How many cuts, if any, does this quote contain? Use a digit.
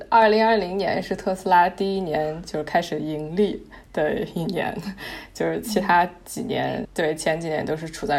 1